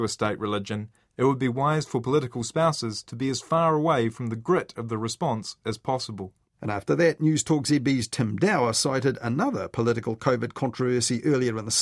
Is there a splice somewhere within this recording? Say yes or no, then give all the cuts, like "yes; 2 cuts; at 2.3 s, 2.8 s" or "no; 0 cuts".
no; 0 cuts